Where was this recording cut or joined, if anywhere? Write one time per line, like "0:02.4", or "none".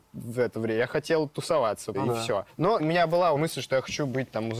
0:01.9
0:02.8
0:03.4